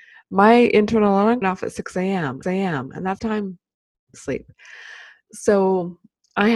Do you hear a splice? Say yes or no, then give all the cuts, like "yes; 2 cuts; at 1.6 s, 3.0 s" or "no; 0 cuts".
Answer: yes; 4 cuts; at 1.4 s, 2.4 s, 3.2 s, 4.1 s